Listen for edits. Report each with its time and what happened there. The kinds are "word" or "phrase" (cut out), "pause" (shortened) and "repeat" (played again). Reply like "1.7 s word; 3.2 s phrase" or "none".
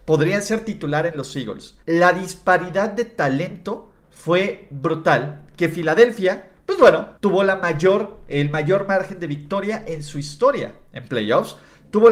1.8 s pause; 7.2 s pause